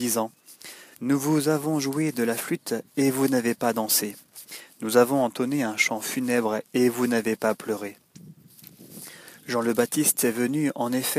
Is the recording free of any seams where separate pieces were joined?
no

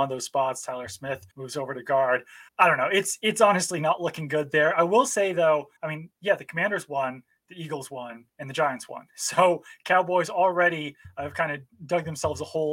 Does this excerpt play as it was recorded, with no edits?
no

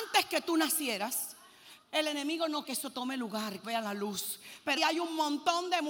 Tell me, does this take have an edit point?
yes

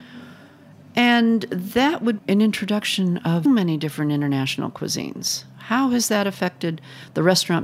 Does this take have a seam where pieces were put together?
yes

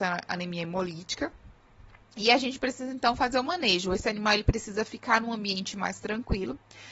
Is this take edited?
no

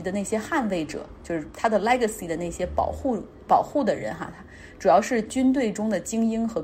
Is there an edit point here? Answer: no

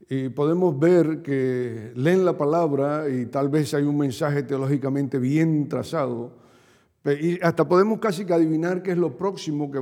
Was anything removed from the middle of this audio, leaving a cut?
no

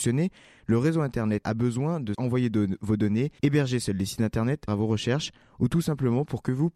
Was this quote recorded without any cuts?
no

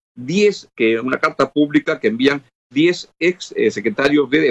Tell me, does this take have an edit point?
no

